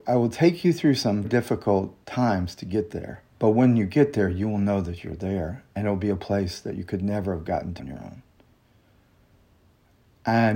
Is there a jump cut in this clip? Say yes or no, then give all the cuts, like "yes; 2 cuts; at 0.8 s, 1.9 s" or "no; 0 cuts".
yes; 4 cuts; at 1.2 s, 2.0 s, 3.3 s, 7.8 s